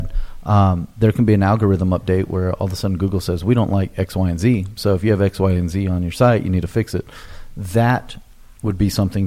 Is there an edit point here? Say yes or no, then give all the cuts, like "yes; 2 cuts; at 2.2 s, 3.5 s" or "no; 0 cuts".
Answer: no; 0 cuts